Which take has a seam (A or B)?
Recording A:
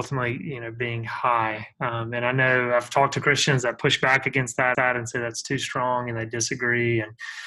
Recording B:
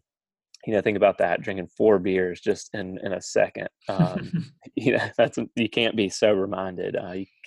A